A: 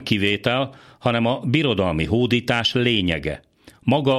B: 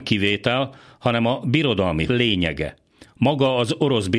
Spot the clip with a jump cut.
B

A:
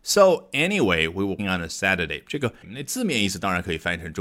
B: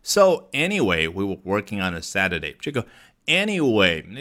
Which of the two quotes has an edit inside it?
A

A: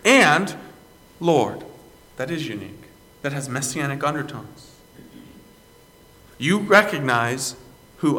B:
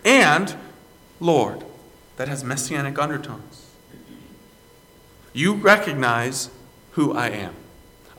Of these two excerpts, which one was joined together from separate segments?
B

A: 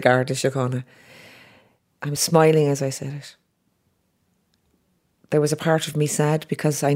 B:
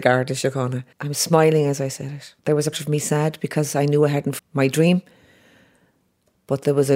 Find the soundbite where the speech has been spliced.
B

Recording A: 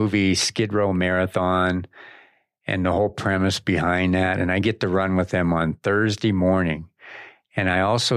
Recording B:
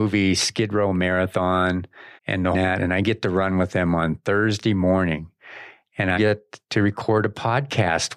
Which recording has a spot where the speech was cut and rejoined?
B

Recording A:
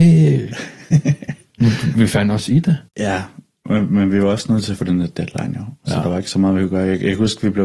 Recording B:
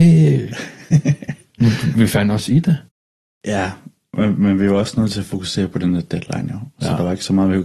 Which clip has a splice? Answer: A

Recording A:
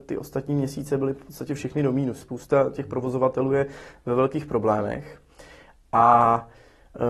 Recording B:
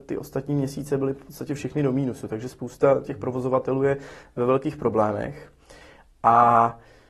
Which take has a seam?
A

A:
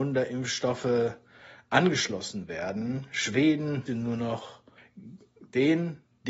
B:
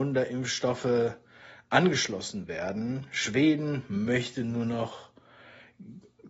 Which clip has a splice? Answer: A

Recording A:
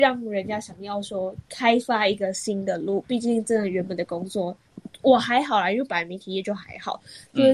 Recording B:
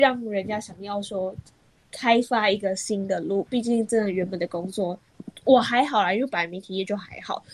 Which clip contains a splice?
A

